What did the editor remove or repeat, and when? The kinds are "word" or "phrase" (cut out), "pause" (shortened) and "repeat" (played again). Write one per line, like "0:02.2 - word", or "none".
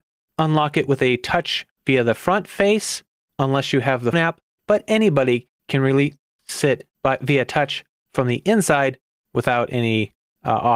0:04.1 - word